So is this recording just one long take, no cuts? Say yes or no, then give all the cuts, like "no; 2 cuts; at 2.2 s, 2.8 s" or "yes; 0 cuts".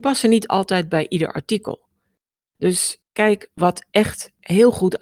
no; 1 cut; at 3.0 s